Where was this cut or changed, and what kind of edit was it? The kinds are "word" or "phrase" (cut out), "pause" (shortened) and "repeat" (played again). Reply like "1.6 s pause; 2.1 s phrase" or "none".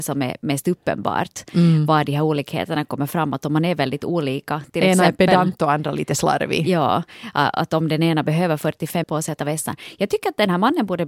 9.0 s word; 9.4 s word